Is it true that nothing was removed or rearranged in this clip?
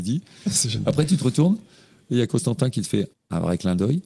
yes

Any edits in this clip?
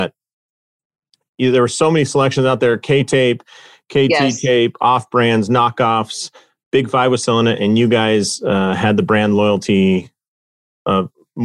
no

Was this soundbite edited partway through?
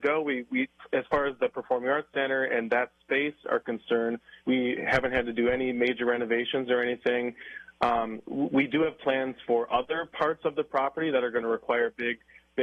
yes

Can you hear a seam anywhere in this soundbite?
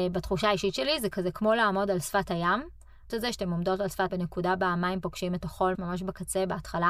yes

